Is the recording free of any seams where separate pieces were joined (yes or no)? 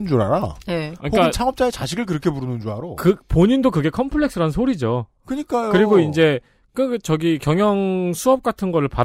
yes